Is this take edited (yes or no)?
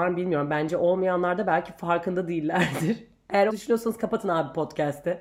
yes